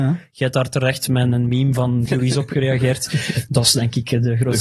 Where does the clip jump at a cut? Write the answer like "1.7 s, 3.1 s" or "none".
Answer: 2.1 s